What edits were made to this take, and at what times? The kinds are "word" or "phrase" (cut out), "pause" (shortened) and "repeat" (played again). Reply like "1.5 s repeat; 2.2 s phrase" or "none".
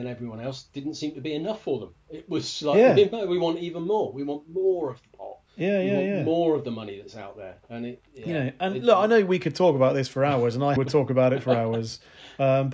5.4 s pause; 10.8 s word